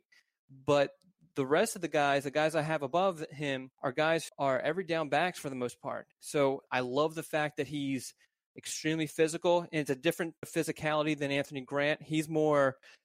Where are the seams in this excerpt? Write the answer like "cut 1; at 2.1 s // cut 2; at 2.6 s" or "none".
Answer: cut 1; at 3.7 s // cut 2; at 4.3 s // cut 3; at 6.1 s // cut 4; at 10.4 s